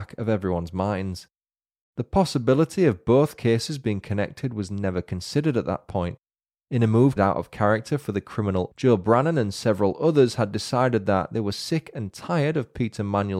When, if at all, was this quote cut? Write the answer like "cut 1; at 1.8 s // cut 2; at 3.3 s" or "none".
cut 1; at 7.2 s // cut 2; at 8.7 s